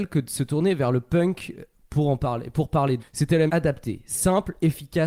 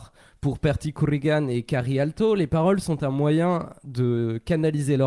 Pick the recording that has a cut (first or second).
first